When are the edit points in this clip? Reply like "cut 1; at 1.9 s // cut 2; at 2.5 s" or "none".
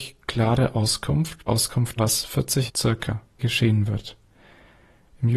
cut 1; at 1.5 s // cut 2; at 2.0 s // cut 3; at 2.7 s // cut 4; at 3.4 s

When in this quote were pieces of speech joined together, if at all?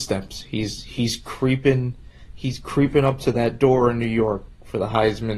none

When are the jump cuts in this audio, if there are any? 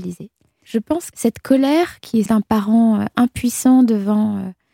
cut 1; at 1.1 s // cut 2; at 2.3 s

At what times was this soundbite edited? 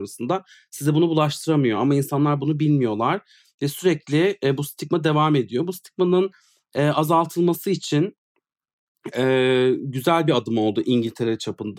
none

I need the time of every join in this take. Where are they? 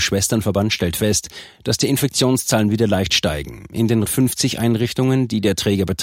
cut 1; at 4.1 s

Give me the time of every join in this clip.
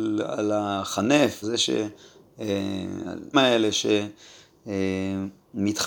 cut 1; at 1.4 s // cut 2; at 3.3 s

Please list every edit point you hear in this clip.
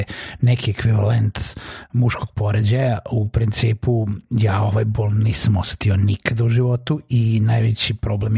none

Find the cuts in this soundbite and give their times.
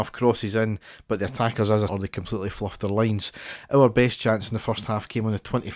cut 1; at 1.9 s

